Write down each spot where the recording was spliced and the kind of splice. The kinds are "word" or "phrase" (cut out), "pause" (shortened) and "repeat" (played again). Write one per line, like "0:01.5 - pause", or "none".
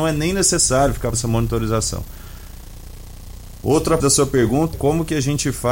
0:01.1 - word
0:04.0 - word
0:04.7 - word